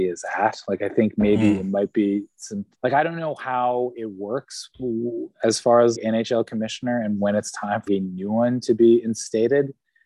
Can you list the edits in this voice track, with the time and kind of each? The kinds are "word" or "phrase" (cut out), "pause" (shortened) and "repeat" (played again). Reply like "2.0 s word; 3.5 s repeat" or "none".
2.7 s pause; 5.9 s word; 7.9 s word